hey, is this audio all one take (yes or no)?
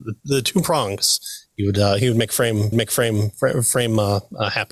no